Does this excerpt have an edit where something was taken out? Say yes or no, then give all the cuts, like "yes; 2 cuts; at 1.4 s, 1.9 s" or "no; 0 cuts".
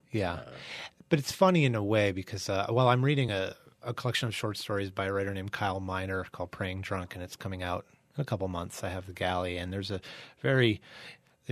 no; 0 cuts